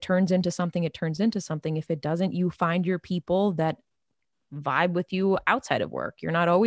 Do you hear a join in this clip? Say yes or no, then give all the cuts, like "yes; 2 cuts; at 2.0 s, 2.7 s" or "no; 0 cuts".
no; 0 cuts